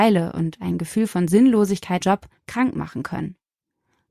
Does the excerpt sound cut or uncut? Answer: cut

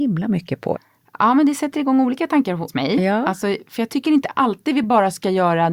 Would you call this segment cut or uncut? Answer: uncut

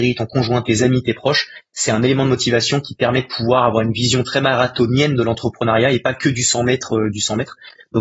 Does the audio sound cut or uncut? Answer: uncut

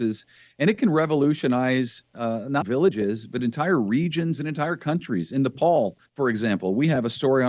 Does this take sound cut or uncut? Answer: cut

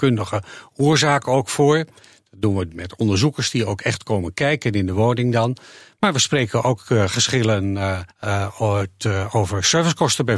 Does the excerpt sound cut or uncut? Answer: cut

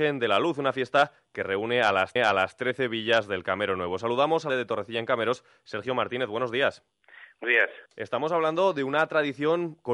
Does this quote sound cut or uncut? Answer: cut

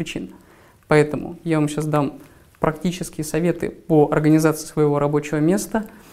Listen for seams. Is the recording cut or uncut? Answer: uncut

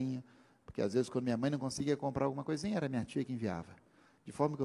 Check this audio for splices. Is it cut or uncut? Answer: uncut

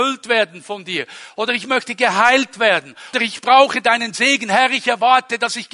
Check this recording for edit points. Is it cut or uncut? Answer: cut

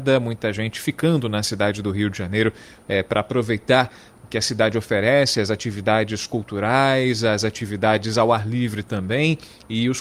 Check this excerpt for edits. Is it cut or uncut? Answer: uncut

